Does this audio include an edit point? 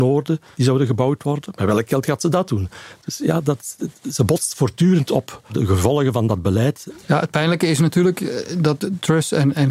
no; 0 cuts

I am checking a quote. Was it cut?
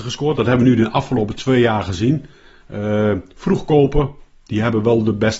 no; 0 cuts

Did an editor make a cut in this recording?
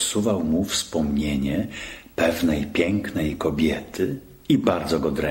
no; 0 cuts

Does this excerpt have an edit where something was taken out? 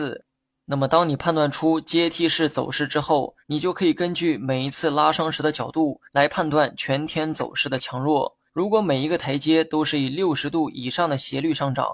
yes; 3 cuts; at 3.4 s, 6.1 s, 8.5 s

